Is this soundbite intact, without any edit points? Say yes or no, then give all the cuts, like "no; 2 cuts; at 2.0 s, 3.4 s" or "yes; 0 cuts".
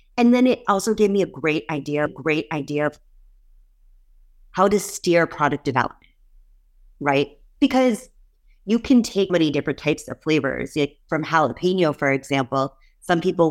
no; 2 cuts; at 2.1 s, 9.3 s